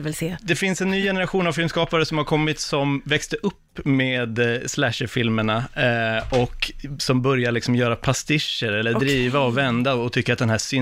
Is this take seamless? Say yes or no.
yes